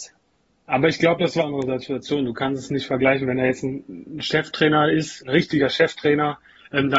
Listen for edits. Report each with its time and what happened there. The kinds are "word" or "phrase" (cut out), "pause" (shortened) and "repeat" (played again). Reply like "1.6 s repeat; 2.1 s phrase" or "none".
1.4 s phrase; 5.2 s word